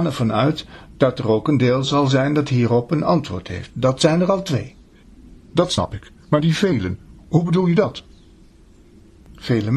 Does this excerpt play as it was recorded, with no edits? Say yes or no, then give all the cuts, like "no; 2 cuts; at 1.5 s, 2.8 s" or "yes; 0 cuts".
yes; 0 cuts